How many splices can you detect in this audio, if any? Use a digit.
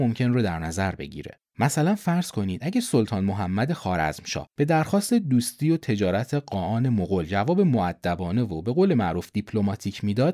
1